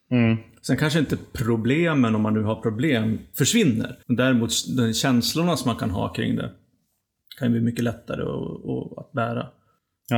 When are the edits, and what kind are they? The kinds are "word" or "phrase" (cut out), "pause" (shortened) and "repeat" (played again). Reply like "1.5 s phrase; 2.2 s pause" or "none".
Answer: 4.0 s pause